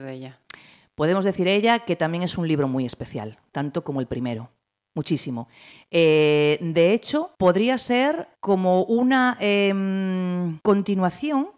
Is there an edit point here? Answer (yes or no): yes